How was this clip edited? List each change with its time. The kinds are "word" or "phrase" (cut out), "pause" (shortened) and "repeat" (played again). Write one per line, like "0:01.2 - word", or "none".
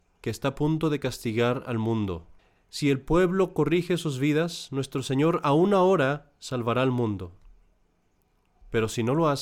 0:02.4 - pause

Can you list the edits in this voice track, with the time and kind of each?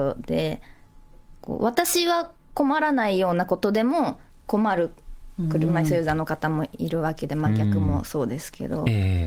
0:04.3 - pause

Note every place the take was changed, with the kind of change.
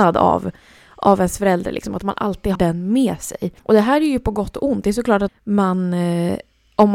0:02.6 - word
0:03.6 - pause
0:05.3 - word

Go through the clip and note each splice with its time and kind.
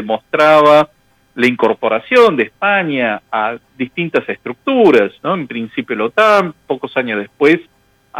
none

